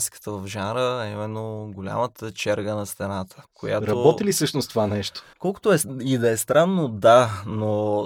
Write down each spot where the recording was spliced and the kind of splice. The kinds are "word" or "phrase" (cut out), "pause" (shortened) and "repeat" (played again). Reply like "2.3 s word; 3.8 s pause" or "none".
3.5 s pause; 5.3 s pause